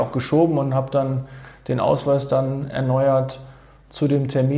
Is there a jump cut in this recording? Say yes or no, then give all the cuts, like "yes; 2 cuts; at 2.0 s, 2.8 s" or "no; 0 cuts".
no; 0 cuts